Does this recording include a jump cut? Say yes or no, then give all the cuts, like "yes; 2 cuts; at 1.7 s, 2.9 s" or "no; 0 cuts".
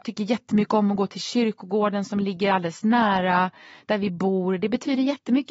no; 0 cuts